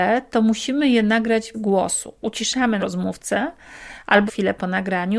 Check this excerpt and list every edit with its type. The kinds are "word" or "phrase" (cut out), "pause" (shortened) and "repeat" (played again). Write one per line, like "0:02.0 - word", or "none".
0:01.5 - word
0:02.8 - word
0:04.3 - word